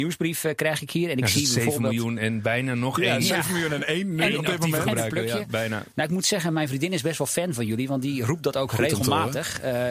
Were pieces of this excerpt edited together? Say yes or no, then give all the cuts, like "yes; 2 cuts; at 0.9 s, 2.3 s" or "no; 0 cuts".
no; 0 cuts